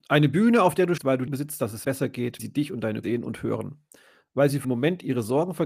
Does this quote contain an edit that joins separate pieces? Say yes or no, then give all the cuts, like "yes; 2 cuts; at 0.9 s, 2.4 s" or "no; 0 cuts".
yes; 6 cuts; at 1.0 s, 1.3 s, 1.8 s, 2.4 s, 3.0 s, 4.6 s